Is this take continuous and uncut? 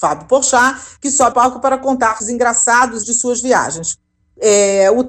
no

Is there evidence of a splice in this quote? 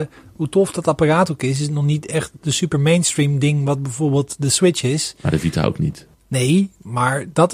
yes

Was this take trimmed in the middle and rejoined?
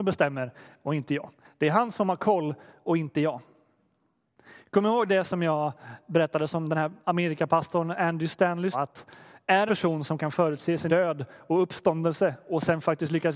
yes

